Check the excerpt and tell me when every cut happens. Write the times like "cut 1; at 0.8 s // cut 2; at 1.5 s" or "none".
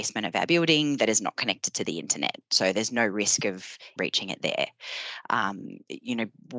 cut 1; at 4.0 s